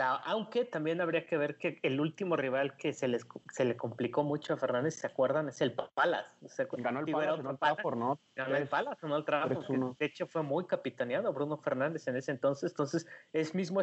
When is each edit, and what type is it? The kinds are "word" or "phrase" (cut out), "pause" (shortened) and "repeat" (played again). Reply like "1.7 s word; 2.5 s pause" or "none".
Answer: 6.4 s pause

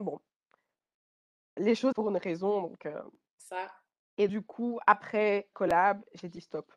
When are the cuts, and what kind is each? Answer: 1.6 s word; 1.9 s word; 4.3 s word; 5.5 s word

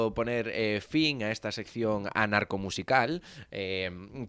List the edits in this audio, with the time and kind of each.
none

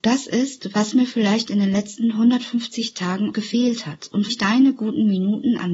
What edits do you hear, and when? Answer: 3.3 s word; 4.3 s word

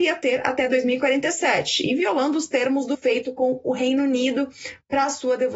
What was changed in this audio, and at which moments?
2.9 s word

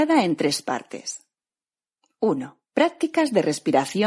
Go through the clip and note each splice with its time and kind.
2.7 s pause

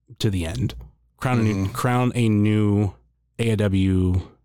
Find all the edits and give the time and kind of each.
none

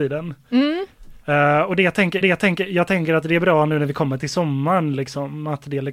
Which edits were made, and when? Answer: 1.2 s pause; 2.2 s repeat

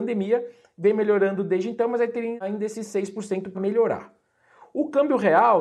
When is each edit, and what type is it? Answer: 3.5 s word

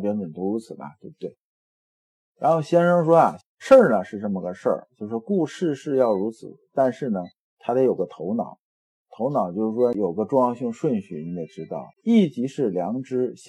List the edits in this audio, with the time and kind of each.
11.9 s pause

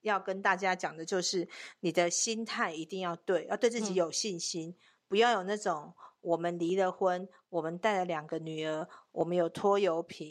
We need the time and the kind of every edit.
none

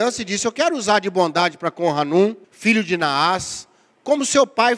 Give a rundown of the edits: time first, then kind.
2.4 s pause

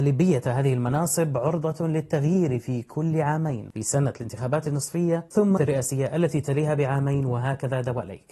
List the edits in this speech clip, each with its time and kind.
5.6 s word

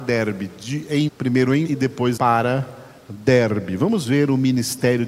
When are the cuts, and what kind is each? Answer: 1.1 s word; 1.7 s word; 2.2 s word

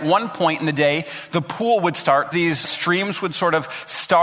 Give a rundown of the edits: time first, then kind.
2.3 s phrase; 2.6 s phrase

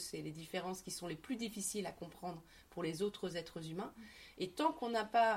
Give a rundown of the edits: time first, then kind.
none

